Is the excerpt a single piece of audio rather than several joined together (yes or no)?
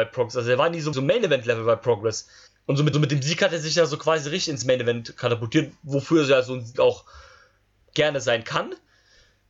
no